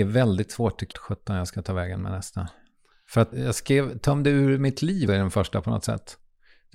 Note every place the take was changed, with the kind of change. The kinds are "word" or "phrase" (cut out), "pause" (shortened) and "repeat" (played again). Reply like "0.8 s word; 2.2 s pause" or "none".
0.9 s phrase; 3.3 s word; 5.1 s word